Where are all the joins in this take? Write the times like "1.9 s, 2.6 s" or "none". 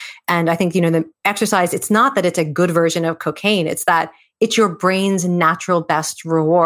1.1 s